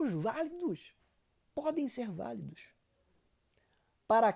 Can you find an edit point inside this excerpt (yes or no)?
yes